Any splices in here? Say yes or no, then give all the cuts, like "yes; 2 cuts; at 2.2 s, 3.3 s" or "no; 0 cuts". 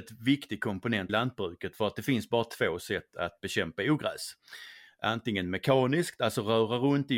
yes; 1 cut; at 1.1 s